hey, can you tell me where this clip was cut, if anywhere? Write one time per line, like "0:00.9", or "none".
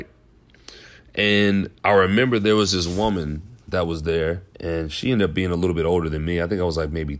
0:01.8
0:03.6
0:04.5

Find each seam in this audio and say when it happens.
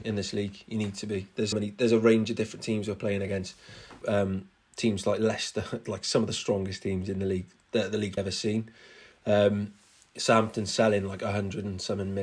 0:01.5
0:04.0
0:08.2

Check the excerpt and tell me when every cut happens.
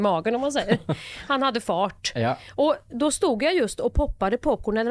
none

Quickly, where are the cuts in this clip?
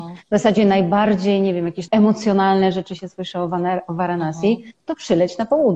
0:01.9

